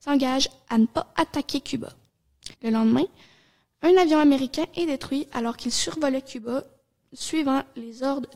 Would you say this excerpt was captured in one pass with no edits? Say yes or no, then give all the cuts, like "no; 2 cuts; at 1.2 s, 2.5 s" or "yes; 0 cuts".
no; 1 cut; at 2.5 s